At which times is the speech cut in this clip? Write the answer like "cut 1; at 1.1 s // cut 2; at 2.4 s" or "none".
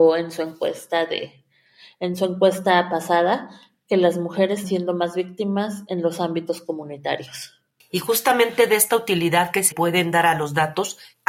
cut 1; at 4.6 s // cut 2; at 9.7 s